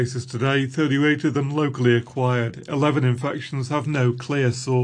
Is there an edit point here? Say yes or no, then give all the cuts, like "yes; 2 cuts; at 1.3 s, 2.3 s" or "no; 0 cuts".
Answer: no; 0 cuts